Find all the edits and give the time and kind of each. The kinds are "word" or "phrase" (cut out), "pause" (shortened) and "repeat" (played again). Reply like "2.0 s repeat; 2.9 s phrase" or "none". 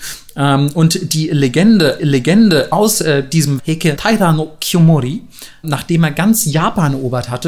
2.0 s repeat; 3.6 s word; 4.0 s phrase; 5.6 s word